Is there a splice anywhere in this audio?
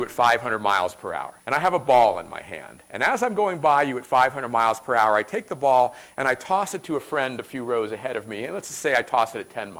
yes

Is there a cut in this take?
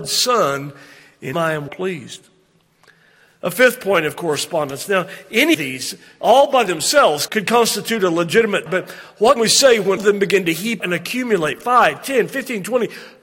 yes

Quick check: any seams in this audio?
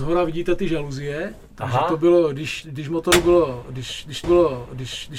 yes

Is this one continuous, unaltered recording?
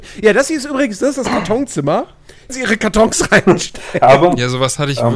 no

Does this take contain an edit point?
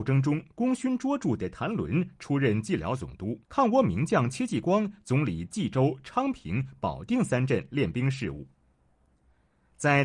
yes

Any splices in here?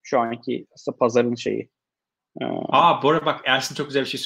no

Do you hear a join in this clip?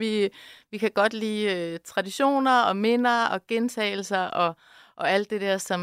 no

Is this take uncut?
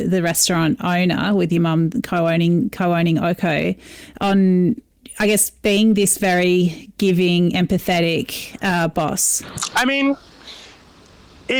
yes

